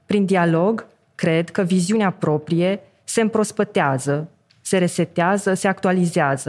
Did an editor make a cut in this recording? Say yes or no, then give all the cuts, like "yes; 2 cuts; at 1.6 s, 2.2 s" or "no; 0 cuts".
no; 0 cuts